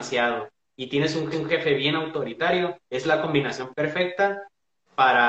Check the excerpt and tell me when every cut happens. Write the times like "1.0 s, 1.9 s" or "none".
1.3 s, 2.8 s